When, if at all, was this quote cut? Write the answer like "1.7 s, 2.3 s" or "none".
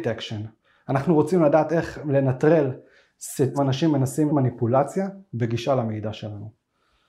3.5 s, 4.3 s